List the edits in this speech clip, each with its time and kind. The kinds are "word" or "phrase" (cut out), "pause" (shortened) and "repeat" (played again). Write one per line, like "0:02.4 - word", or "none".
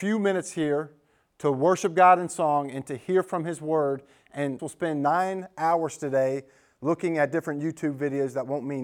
0:04.6 - word